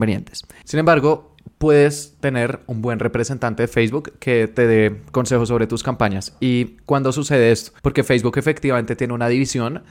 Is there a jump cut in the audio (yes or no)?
yes